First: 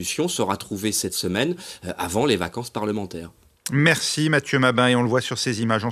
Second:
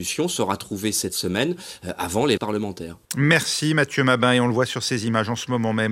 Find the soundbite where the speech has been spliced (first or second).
second